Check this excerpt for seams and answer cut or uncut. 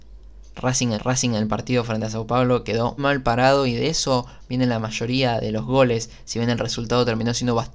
cut